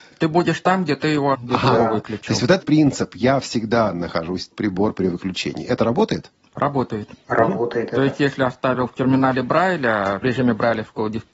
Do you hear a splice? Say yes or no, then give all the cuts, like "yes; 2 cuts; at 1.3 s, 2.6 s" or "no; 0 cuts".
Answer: yes; 4 cuts; at 1.3 s, 2.6 s, 4.5 s, 10.2 s